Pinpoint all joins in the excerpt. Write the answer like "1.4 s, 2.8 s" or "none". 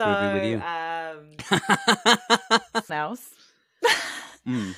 2.9 s